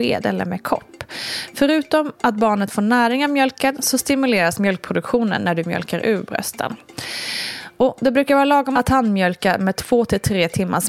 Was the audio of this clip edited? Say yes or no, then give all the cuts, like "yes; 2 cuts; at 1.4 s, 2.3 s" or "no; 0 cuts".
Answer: no; 0 cuts